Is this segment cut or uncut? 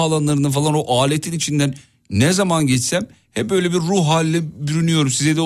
uncut